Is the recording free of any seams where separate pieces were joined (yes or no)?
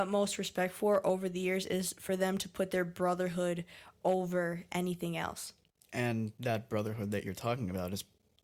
yes